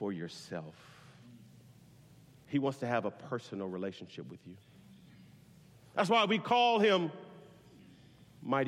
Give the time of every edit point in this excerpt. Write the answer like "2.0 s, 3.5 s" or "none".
none